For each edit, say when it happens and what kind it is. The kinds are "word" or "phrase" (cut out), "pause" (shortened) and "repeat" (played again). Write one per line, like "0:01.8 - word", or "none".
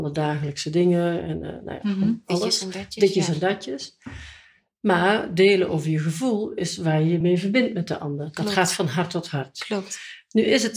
none